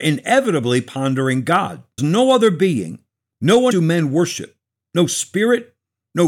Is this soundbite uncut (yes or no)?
no